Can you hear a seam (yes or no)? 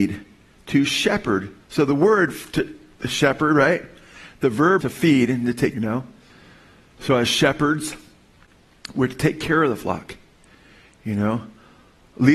yes